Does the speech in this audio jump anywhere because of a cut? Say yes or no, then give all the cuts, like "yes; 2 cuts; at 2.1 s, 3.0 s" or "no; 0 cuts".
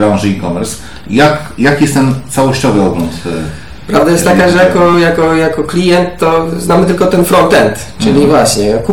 no; 0 cuts